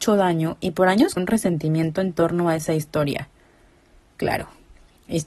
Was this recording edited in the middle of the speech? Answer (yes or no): yes